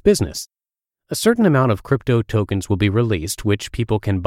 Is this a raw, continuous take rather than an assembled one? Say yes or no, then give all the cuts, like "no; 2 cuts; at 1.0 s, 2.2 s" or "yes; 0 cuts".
yes; 0 cuts